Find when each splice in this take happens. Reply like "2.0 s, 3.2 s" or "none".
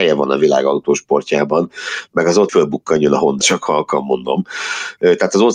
2.5 s, 3.4 s